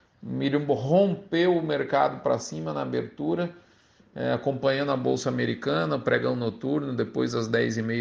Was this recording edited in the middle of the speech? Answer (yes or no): no